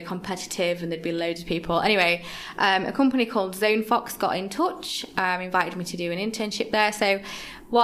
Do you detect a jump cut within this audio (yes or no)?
no